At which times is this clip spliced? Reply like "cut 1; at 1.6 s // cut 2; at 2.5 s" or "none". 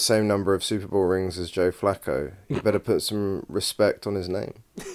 none